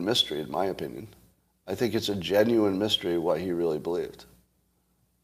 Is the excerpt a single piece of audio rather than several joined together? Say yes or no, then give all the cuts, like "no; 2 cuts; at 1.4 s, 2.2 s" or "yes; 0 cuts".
yes; 0 cuts